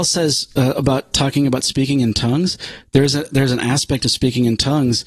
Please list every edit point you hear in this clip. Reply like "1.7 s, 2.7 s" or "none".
none